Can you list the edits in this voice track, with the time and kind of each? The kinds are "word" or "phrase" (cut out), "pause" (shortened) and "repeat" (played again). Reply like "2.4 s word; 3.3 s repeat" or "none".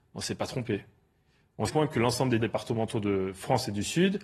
1.7 s phrase; 2.4 s word